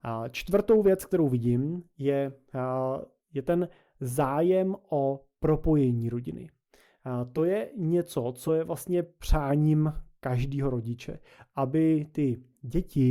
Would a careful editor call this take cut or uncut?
uncut